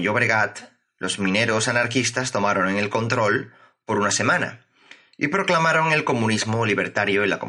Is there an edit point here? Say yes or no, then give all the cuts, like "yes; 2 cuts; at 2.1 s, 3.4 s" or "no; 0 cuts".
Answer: no; 0 cuts